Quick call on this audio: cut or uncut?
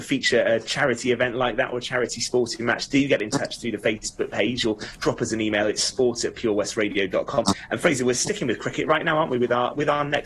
uncut